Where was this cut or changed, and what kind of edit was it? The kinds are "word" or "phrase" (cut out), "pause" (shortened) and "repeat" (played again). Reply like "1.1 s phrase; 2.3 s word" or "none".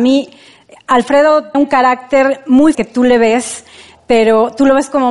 1.5 s word; 2.7 s word